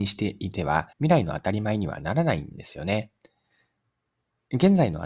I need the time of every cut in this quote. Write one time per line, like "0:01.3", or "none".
0:00.9